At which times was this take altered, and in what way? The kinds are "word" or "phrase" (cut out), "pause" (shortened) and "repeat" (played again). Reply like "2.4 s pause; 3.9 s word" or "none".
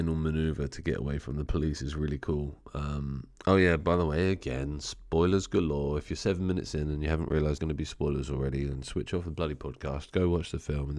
3.3 s pause; 7.6 s word